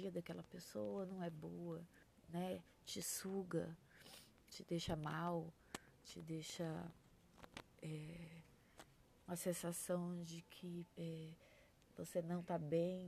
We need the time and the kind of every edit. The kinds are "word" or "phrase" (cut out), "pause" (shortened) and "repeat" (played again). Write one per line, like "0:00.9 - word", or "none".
0:02.0 - pause
0:09.3 - word
0:10.9 - pause